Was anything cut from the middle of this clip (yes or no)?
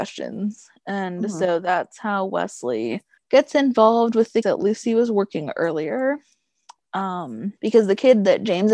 yes